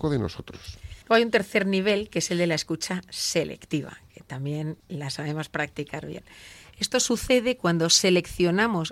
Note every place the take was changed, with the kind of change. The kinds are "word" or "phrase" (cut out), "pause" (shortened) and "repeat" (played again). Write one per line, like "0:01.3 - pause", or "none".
0:01.0 - pause
0:04.8 - pause